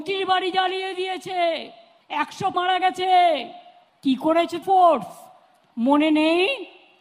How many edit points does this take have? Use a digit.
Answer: 2